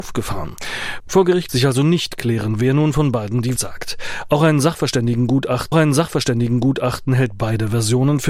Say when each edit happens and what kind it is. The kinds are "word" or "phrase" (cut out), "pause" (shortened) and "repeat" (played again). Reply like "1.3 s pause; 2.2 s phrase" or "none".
1.5 s word; 3.6 s word; 5.7 s repeat